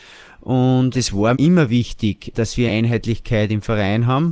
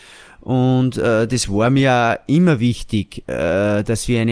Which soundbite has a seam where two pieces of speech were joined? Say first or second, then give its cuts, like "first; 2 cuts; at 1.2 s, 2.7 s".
first; 4 cuts; at 0.9 s, 1.3 s, 2.3 s, 2.7 s